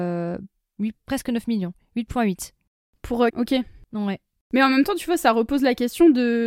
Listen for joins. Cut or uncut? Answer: cut